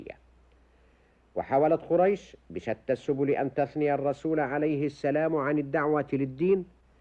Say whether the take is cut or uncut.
uncut